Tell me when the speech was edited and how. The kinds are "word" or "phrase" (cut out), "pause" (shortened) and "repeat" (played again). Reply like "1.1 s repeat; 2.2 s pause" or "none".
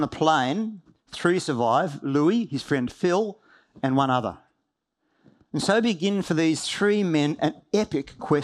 none